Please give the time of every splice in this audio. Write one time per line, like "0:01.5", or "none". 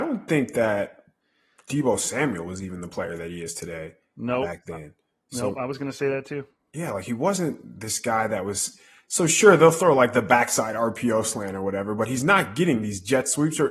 none